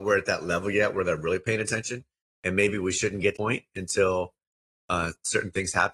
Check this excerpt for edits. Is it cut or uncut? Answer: cut